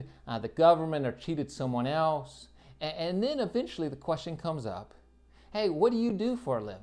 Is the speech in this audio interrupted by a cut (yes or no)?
no